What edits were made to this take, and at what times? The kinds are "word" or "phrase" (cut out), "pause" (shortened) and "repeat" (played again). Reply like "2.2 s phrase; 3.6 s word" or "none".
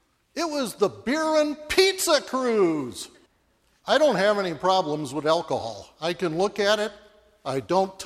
3.3 s pause